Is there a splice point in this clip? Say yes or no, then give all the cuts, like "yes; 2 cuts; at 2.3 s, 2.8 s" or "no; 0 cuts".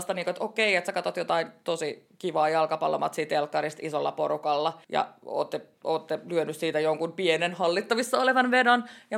yes; 1 cut; at 4.8 s